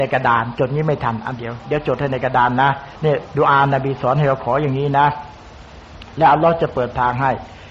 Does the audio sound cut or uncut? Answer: cut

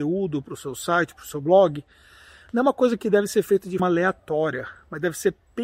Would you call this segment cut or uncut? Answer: cut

